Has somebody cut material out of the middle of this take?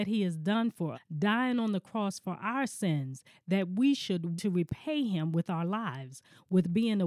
yes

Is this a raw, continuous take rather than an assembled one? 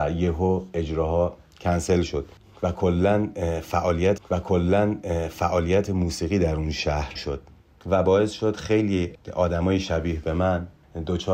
no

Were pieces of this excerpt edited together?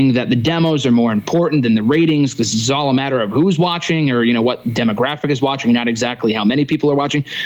no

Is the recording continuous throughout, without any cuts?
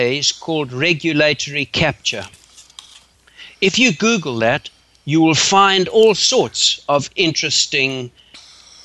yes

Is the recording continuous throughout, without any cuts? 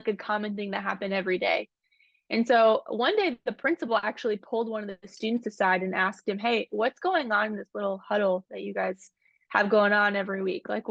yes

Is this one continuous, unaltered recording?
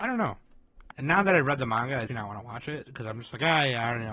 no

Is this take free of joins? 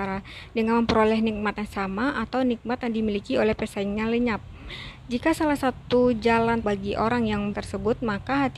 no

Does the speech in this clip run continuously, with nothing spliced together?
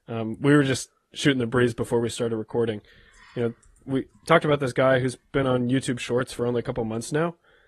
yes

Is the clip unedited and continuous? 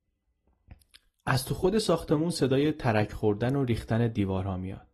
yes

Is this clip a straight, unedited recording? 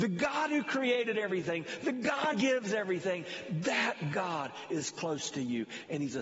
no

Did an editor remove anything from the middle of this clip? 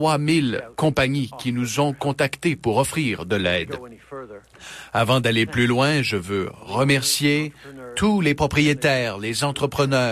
no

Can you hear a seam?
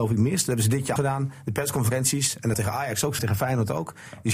yes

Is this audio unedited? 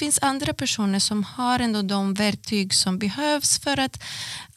yes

